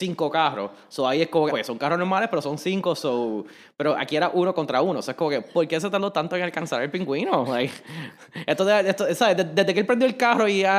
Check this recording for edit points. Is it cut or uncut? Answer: cut